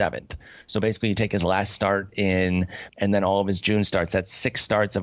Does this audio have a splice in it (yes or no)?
yes